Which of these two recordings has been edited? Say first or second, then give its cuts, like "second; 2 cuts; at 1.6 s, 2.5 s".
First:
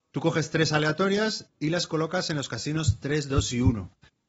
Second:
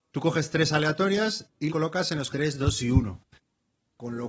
second; 2 cuts; at 1.7 s, 2.3 s